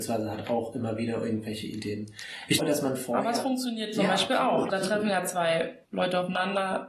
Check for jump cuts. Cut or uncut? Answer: cut